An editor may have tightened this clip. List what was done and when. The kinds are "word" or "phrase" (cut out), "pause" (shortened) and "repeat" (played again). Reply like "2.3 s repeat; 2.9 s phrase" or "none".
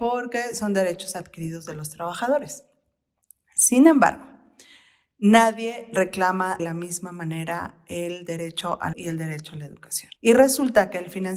6.6 s word; 8.9 s phrase; 10.2 s pause